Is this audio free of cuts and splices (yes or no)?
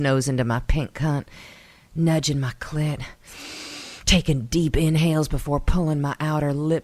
yes